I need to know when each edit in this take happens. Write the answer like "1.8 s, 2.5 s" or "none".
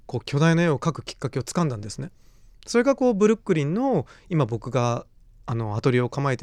none

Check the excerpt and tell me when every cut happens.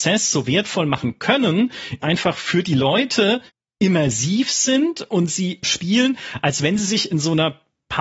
2.0 s, 3.5 s, 5.6 s

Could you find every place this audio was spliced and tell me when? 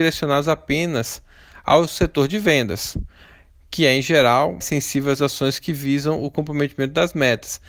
4.6 s

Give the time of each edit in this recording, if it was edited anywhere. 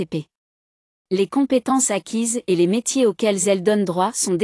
none

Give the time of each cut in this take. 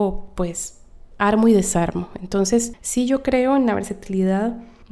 none

